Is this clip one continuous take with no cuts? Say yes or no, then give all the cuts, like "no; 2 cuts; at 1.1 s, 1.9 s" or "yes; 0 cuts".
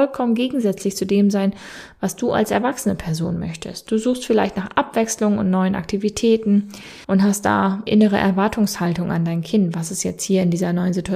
no; 2 cuts; at 7.0 s, 7.9 s